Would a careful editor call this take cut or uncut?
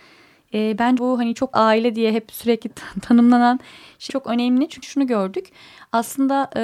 cut